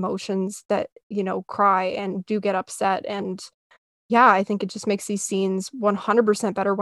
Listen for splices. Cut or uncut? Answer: uncut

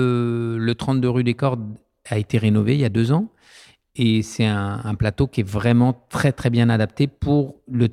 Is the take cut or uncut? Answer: uncut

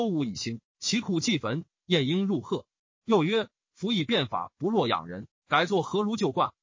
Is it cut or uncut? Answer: uncut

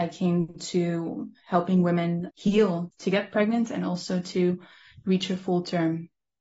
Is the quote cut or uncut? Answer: uncut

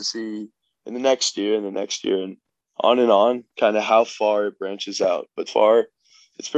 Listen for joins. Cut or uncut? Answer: cut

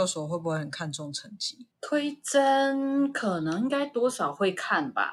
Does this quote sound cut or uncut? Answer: cut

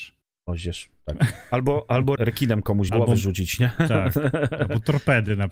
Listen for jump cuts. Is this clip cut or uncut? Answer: cut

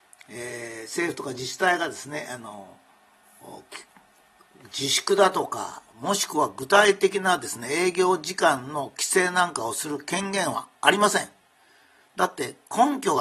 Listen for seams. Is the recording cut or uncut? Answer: uncut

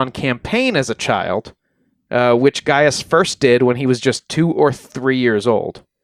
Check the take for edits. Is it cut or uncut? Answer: uncut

